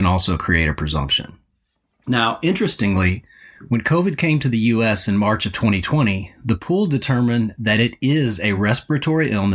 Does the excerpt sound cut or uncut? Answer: uncut